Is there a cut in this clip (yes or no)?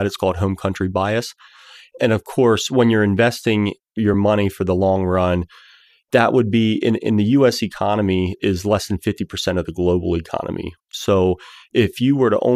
no